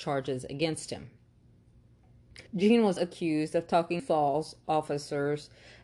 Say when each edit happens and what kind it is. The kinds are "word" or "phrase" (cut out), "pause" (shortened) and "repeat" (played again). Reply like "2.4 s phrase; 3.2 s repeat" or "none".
2.5 s pause; 3.0 s word; 4.0 s phrase